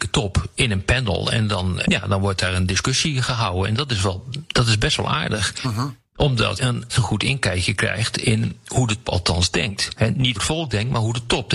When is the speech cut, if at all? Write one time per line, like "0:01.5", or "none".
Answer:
0:01.8
0:06.5
0:06.9
0:09.0
0:10.4